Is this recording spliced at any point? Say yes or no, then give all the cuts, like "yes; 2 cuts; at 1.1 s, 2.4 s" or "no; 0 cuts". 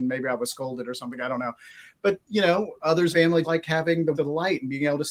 yes; 3 cuts; at 3.1 s, 3.4 s, 4.1 s